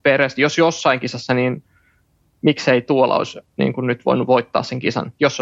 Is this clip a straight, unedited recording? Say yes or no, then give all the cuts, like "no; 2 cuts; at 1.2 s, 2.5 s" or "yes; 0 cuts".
yes; 0 cuts